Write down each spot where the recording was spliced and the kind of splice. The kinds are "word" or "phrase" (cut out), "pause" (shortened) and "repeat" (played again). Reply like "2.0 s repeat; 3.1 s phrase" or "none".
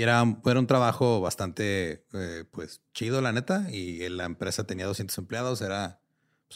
none